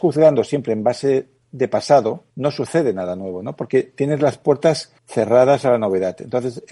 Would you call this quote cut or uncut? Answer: cut